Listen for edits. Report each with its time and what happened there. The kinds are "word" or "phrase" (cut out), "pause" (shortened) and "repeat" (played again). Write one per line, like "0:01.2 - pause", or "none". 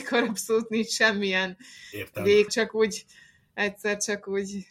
0:02.5 - word